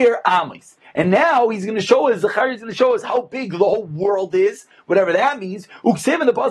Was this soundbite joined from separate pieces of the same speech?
no; 0 cuts

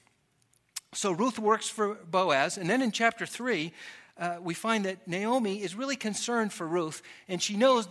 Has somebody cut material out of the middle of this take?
no; 0 cuts

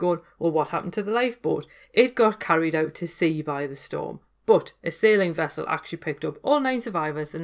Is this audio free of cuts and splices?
yes; 0 cuts

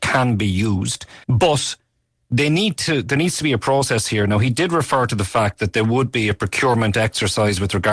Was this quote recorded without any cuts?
no; 1 cut; at 1.2 s

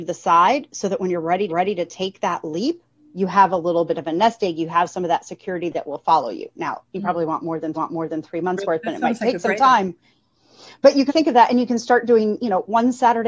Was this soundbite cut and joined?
yes; 5 cuts; at 1.5 s, 2.9 s, 6.9 s, 7.7 s, 11.1 s

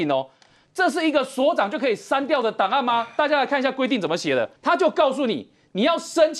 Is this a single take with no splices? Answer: no; 1 cut; at 4.6 s

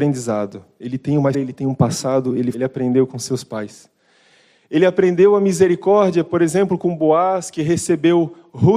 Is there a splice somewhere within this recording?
yes; 2 cuts; at 1.3 s, 2.5 s

